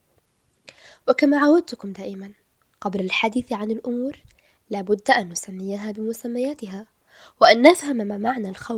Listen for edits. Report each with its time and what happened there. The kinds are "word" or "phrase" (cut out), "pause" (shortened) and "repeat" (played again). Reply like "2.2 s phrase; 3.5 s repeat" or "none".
none